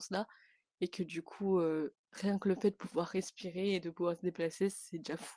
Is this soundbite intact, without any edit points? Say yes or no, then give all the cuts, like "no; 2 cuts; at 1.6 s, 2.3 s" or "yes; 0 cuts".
yes; 0 cuts